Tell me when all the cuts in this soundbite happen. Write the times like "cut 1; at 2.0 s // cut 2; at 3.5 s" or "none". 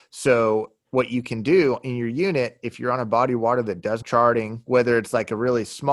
cut 1; at 4.0 s